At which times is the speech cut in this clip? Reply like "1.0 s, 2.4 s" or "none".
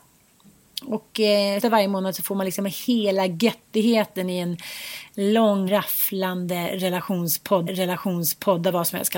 1.6 s, 5.7 s, 7.7 s